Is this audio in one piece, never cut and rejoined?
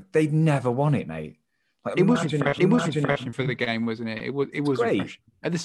no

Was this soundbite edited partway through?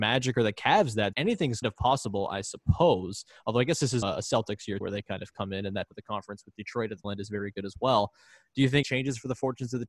yes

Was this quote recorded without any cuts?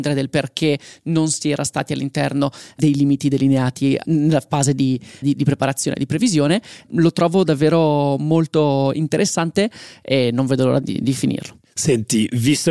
no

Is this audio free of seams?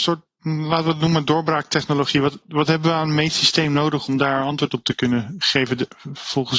no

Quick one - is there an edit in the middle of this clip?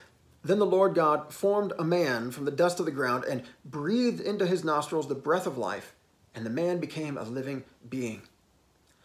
no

